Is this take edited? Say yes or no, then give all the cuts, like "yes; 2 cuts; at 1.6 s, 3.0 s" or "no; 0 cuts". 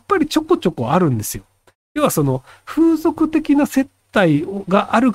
no; 0 cuts